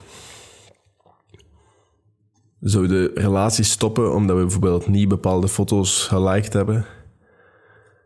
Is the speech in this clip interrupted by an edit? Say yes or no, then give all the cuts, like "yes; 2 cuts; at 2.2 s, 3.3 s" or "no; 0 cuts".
no; 0 cuts